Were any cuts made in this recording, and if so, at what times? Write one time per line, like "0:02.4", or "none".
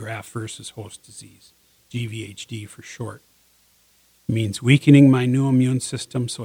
none